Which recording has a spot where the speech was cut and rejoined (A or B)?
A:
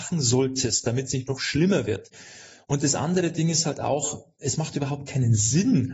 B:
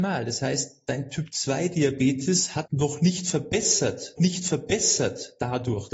B